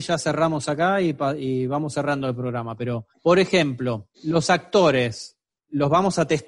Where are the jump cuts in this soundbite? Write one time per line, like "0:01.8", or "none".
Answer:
0:03.1
0:04.1